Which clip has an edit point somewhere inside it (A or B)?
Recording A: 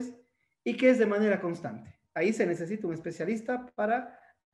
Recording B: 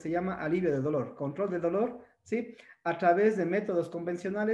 A